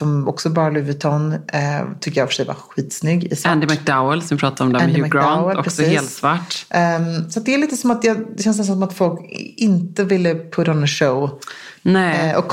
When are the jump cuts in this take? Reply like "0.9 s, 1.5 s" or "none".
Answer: none

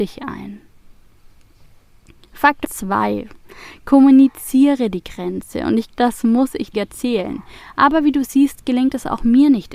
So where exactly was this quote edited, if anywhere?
2.6 s, 5.9 s, 6.7 s

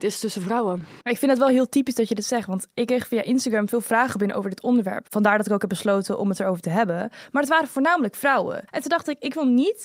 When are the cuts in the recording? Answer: 1.0 s, 8.7 s

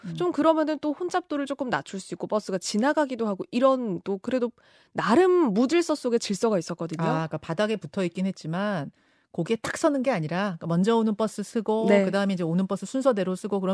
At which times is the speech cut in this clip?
none

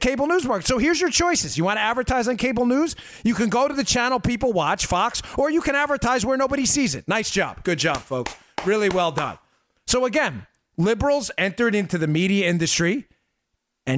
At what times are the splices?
none

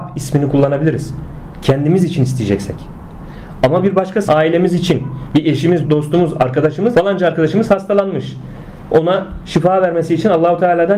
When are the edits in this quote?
4.3 s, 5.8 s, 6.9 s

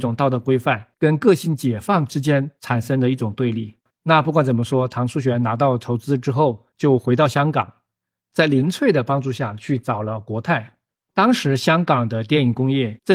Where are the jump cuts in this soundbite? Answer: none

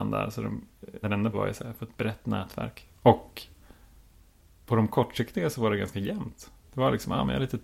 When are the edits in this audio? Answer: 1.0 s, 1.3 s, 3.0 s, 6.6 s

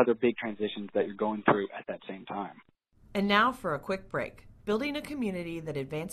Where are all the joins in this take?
2.7 s, 4.6 s

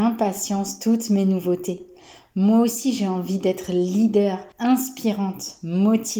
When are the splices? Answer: 4.5 s

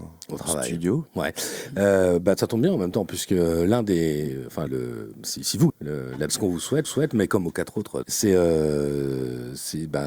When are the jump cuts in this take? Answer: 1.1 s, 4.7 s, 5.7 s, 6.3 s, 6.8 s, 8.0 s

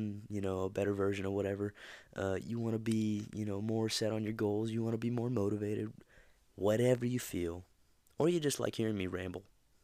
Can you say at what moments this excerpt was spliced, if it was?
none

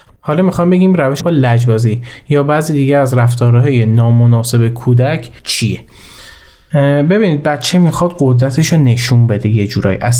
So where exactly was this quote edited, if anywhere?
1.2 s, 5.4 s

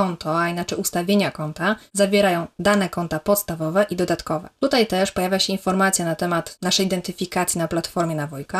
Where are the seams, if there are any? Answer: none

